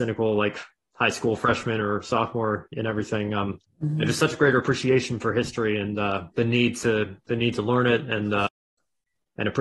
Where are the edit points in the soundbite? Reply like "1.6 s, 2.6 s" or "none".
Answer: 3.6 s, 6.3 s